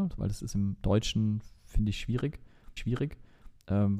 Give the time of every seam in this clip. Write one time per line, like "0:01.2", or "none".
0:02.8